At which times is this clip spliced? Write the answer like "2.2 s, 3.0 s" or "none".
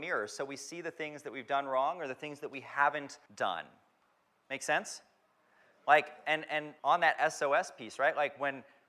3.3 s, 6.8 s